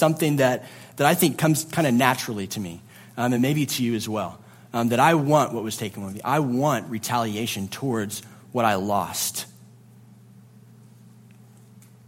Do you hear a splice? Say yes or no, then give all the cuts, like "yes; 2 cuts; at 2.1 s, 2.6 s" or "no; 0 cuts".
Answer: no; 0 cuts